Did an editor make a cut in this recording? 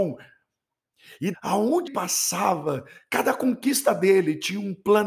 yes; 2 cuts; at 1.3 s, 1.9 s

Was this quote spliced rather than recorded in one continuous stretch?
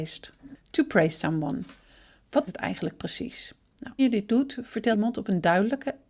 yes; 3 cuts; at 2.5 s, 4.0 s, 4.9 s

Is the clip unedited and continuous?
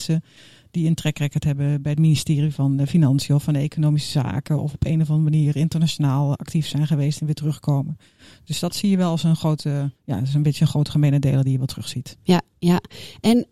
no; 1 cut; at 10.0 s

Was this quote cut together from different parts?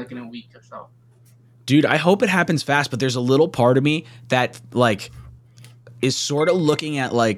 no; 0 cuts

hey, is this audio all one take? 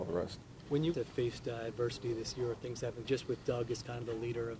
no; 2 cuts; at 0.9 s, 3.0 s

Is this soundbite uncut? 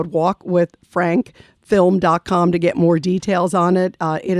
yes; 0 cuts

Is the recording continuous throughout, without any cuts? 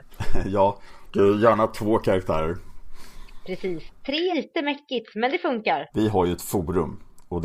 no; 3 cuts; at 1.1 s, 4.3 s, 5.9 s

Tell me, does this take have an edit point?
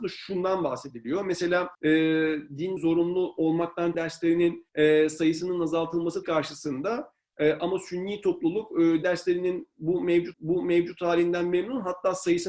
yes; 7 cuts; at 1.7 s, 2.8 s, 3.9 s, 4.7 s, 6.2 s, 9.0 s, 10.3 s

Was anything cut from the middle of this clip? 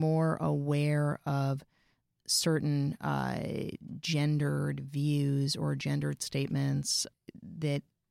no; 0 cuts

